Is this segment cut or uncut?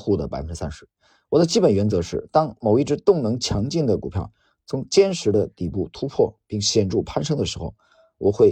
uncut